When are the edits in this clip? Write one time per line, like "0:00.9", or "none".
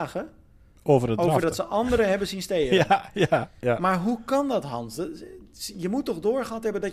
none